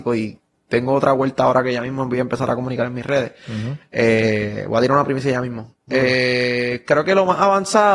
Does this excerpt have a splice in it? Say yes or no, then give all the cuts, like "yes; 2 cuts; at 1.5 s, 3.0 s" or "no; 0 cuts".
no; 0 cuts